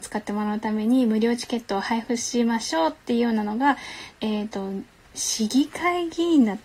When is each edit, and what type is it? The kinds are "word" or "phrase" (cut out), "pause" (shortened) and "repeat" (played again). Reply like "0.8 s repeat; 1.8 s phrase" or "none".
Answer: 4.2 s pause